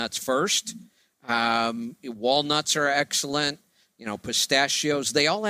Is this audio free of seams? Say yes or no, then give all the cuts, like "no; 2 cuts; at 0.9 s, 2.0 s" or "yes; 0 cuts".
yes; 0 cuts